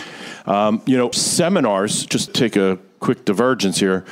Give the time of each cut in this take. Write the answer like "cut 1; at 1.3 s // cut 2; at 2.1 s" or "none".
cut 1; at 1.1 s // cut 2; at 2.3 s